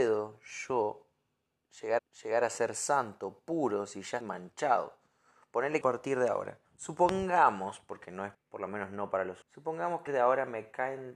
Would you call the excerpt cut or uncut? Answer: cut